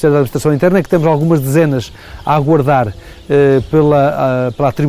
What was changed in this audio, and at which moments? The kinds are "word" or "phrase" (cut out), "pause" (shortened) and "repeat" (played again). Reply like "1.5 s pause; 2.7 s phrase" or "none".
none